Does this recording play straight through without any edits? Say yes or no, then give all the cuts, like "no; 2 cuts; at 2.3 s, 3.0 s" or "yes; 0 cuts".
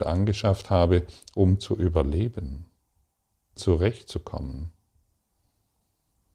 no; 1 cut; at 3.6 s